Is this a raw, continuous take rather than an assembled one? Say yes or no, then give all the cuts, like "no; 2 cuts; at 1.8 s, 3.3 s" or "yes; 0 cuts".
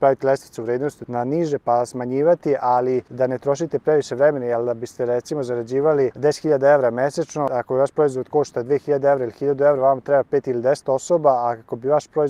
yes; 0 cuts